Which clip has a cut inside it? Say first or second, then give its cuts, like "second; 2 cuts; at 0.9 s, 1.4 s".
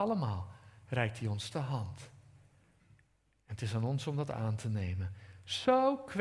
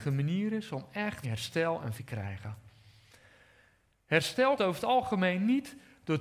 second; 3 cuts; at 1.2 s, 1.9 s, 4.6 s